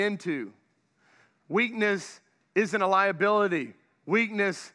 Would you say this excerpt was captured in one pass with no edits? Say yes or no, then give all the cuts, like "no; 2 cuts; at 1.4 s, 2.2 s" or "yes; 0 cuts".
yes; 0 cuts